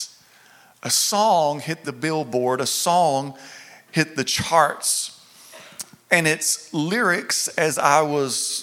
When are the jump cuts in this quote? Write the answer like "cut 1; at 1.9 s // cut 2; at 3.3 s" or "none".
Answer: none